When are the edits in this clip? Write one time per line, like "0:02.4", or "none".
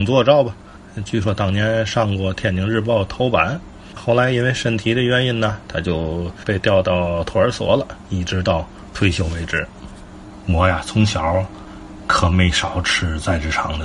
0:04.0